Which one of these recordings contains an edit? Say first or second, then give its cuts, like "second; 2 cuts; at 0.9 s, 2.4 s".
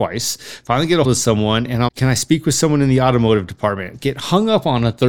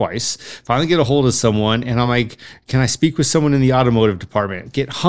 first; 2 cuts; at 1.0 s, 1.9 s